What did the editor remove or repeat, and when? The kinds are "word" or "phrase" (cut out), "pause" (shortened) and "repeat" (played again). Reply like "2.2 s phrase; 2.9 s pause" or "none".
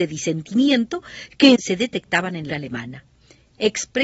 1.6 s word; 2.5 s phrase